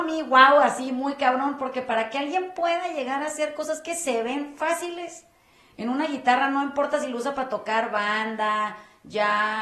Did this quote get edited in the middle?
no; 0 cuts

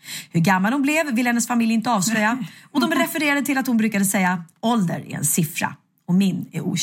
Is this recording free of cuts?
yes; 0 cuts

